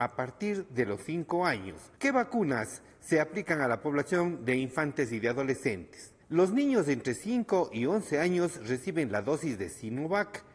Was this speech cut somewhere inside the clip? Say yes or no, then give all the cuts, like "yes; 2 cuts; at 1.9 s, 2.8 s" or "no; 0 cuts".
yes; 2 cuts; at 2.0 s, 6.2 s